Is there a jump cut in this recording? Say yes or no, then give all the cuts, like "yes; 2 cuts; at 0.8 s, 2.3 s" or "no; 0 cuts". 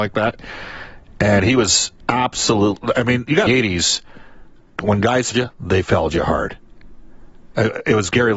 yes; 3 cuts; at 3.5 s, 4.8 s, 5.3 s